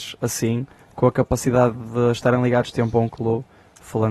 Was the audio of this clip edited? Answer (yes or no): yes